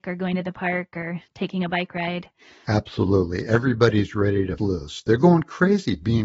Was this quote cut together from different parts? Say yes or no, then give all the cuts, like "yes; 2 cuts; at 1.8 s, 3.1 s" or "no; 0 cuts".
yes; 1 cut; at 4.6 s